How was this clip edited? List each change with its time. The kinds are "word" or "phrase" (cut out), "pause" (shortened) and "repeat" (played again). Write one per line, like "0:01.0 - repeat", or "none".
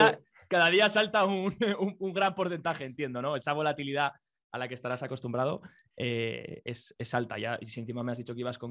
none